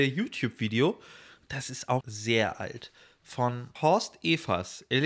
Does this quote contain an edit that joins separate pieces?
yes; 2 cuts; at 2.0 s, 3.8 s

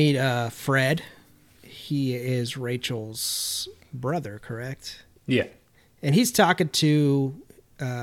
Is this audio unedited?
no; 1 cut; at 5.2 s

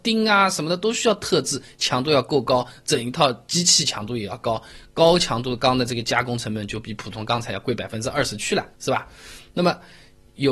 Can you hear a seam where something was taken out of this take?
yes; 1 cut; at 8.7 s

